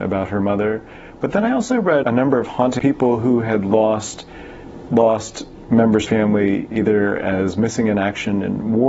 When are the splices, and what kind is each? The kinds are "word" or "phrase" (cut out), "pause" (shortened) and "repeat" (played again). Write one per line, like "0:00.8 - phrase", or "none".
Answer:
0:02.0 - word
0:02.8 - phrase
0:04.9 - word
0:06.0 - phrase
0:06.7 - word